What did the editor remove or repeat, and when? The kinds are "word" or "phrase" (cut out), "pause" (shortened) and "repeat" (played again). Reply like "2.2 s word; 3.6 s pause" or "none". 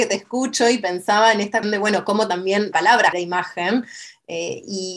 1.6 s word; 2.7 s word; 3.1 s word